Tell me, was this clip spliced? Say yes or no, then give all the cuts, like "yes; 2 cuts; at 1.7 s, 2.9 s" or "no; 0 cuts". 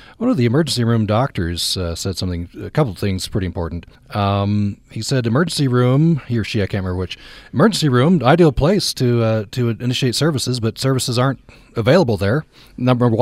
yes; 1 cut; at 4.0 s